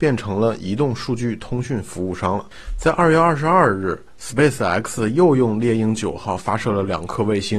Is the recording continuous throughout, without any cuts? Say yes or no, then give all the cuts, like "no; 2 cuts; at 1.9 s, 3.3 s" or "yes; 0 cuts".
yes; 0 cuts